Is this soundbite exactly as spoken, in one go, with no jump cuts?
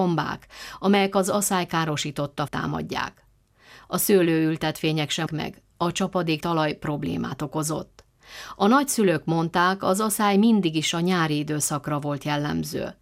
no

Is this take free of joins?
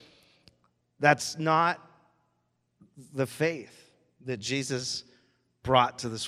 yes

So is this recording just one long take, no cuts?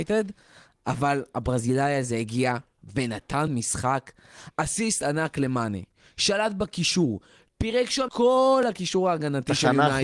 no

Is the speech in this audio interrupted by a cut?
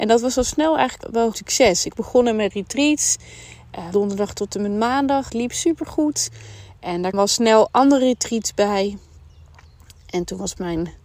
yes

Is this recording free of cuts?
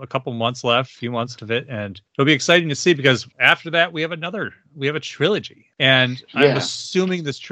no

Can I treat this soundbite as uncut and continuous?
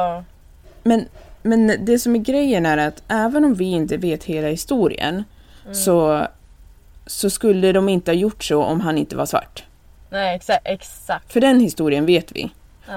yes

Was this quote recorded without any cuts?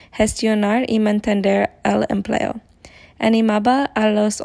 yes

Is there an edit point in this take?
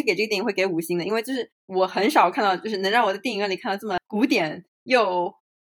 yes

